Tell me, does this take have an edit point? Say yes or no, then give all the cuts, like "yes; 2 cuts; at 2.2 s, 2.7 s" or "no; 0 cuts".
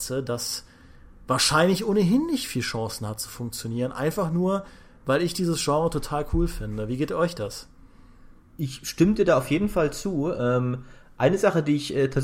no; 0 cuts